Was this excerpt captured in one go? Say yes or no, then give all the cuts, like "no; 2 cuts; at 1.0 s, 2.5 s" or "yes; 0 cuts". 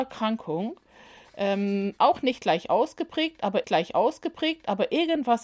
no; 1 cut; at 3.6 s